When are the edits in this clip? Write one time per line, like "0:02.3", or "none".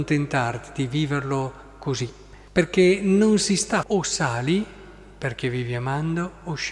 0:02.5
0:03.8